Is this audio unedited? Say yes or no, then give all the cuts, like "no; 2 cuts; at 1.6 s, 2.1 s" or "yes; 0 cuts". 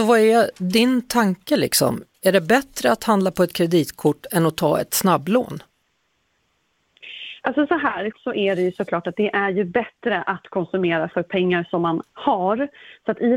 no; 1 cut; at 8.1 s